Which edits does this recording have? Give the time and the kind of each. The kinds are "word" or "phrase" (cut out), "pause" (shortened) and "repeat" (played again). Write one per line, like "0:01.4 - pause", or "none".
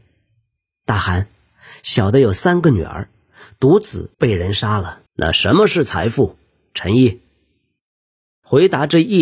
0:04.1 - pause
0:05.1 - pause